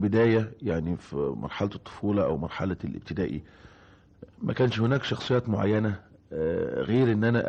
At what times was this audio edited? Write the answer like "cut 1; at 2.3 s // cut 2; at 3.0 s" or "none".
none